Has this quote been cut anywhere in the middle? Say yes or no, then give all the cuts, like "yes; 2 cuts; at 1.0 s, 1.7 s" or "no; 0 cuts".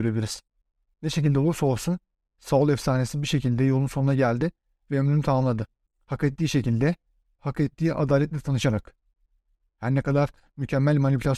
no; 0 cuts